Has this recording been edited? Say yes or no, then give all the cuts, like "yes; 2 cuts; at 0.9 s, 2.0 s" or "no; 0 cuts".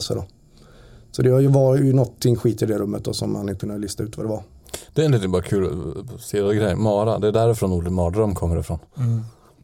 yes; 1 cut; at 3.6 s